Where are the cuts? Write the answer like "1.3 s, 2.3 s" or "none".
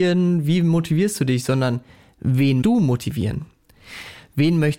2.6 s